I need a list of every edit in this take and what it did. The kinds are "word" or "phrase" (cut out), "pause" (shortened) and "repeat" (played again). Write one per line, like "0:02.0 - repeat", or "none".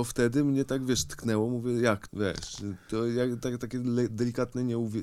0:02.1 - word

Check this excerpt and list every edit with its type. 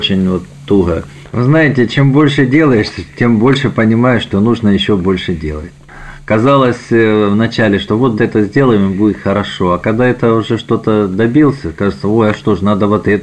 0:08.2 - word

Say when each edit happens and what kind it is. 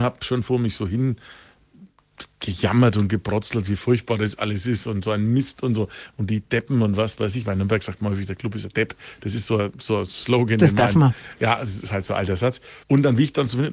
0:12.8 - pause

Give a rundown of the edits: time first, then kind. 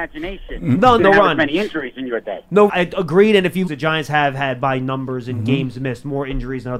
0:01.0 - phrase
0:02.7 - phrase
0:03.7 - phrase

